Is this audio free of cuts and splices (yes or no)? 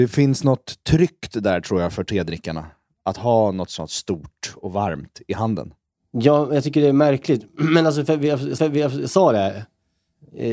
no